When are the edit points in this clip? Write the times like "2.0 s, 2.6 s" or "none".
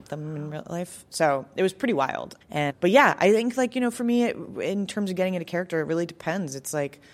2.4 s